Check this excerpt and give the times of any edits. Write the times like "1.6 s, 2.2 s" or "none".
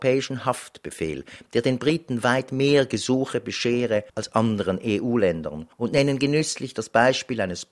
4.1 s, 5.7 s